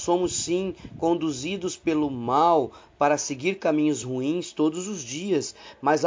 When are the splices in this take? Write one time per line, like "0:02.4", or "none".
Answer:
none